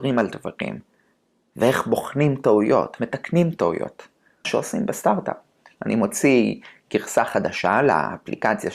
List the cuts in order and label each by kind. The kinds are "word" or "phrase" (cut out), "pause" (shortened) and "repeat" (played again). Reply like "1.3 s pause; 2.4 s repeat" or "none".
3.0 s word; 4.4 s word